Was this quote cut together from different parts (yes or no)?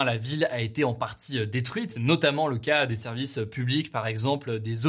yes